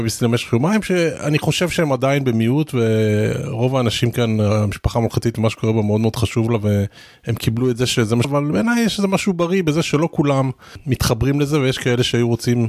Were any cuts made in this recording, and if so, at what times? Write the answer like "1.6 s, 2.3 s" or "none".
8.2 s